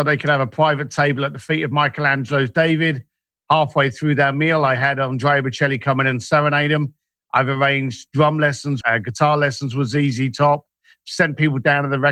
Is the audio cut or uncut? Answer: cut